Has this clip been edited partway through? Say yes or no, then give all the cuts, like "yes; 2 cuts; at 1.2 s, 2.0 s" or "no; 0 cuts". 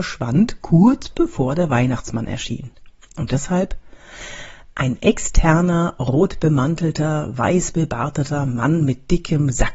no; 0 cuts